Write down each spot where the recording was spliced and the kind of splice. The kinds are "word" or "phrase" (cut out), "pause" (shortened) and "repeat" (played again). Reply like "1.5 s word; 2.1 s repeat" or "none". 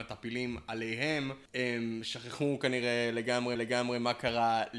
1.5 s pause; 3.5 s repeat